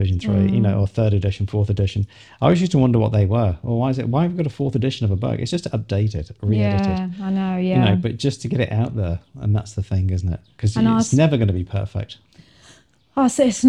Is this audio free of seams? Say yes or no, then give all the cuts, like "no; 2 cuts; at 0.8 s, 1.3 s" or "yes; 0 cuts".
yes; 0 cuts